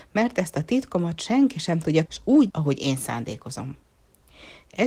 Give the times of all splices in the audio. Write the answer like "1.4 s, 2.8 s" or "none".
2.1 s, 2.5 s